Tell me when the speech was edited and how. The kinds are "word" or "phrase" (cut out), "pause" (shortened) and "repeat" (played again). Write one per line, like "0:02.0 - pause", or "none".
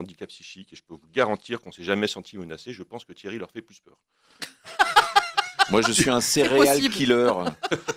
none